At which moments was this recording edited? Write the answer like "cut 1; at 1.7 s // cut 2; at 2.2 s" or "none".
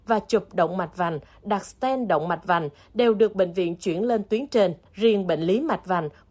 cut 1; at 4.9 s